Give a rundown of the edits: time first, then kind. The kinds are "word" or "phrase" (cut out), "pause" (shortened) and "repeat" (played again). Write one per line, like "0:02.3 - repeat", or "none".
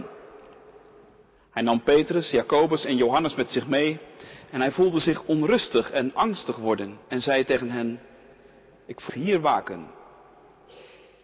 0:07.0 - pause
0:09.1 - phrase